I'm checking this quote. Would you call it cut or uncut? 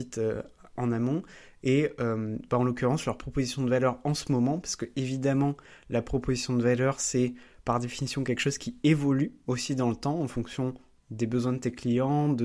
uncut